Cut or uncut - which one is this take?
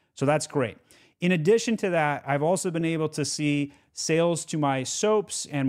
uncut